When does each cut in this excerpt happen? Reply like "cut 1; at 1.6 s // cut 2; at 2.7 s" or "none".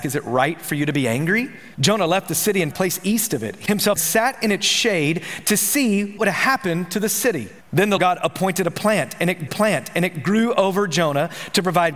cut 1; at 1.7 s // cut 2; at 2.7 s // cut 3; at 3.7 s // cut 4; at 4.0 s // cut 5; at 6.2 s // cut 6; at 7.6 s // cut 7; at 8.0 s // cut 8; at 9.5 s